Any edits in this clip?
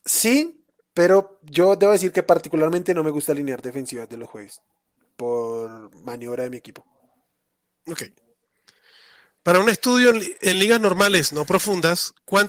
no; 0 cuts

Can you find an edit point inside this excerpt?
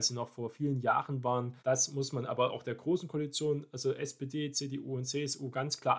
yes; 1 cut; at 1.6 s

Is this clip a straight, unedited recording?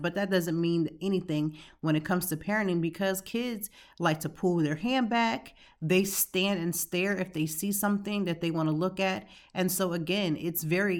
yes; 0 cuts

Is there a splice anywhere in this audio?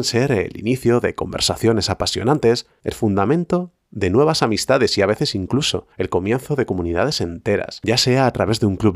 yes; 1 cut; at 5.9 s

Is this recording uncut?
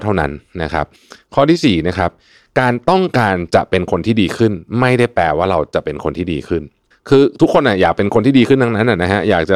yes; 0 cuts

